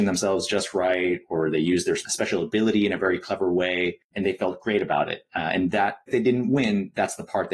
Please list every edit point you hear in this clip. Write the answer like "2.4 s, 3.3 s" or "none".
6.1 s